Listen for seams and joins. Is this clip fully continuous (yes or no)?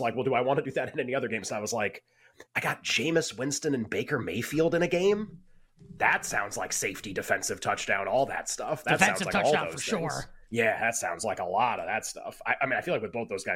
no